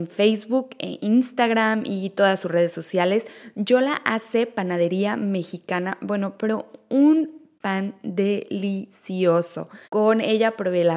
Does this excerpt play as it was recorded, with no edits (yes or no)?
no